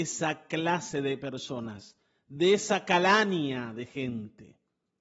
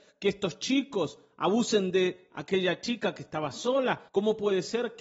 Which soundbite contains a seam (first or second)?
second